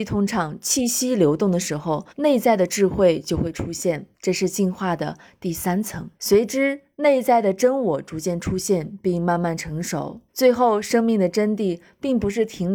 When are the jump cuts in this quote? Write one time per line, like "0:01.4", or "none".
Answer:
0:02.1
0:04.1
0:06.1
0:10.3

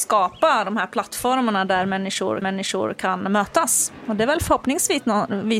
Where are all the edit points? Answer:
0:02.4

